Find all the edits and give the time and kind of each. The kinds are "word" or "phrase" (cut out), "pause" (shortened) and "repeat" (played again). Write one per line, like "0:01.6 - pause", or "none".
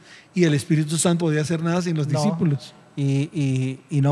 0:01.2 - word